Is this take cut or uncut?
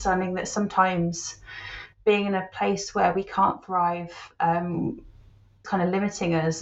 cut